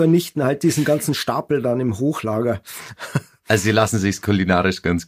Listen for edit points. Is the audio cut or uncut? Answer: uncut